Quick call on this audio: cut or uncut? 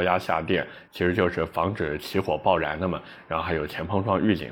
uncut